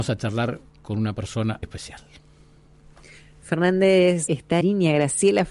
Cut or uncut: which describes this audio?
cut